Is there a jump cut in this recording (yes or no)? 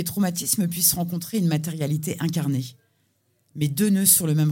no